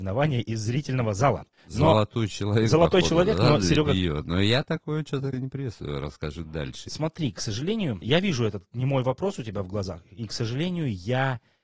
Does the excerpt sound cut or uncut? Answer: cut